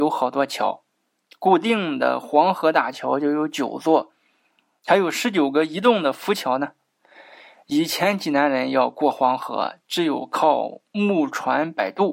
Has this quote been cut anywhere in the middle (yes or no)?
no